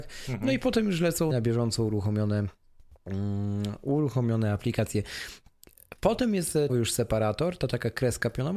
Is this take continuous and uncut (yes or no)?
no